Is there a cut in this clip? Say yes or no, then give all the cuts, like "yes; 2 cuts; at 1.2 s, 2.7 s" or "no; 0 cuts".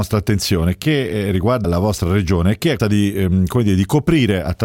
yes; 2 cuts; at 1.6 s, 2.8 s